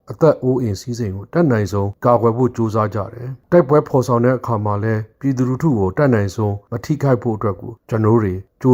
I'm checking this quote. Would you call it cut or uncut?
uncut